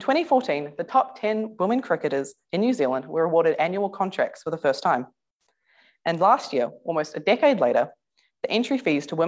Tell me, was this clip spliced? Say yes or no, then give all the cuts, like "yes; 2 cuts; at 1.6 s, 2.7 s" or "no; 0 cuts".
no; 0 cuts